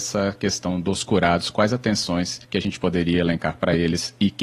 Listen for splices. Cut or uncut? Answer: cut